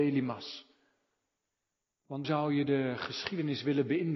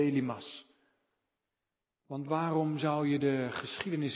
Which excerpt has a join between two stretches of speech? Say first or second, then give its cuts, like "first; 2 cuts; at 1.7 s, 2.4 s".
first; 1 cut; at 2.2 s